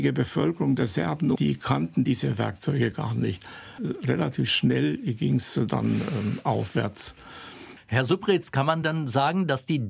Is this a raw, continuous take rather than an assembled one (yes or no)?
yes